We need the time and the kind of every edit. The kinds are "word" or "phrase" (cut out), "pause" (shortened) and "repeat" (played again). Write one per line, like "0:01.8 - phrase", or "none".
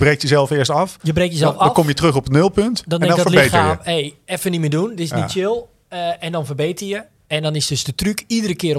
none